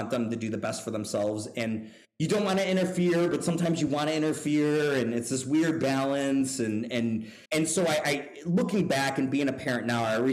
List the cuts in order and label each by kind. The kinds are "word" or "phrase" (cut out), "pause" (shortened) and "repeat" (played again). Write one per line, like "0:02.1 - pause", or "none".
0:07.5 - pause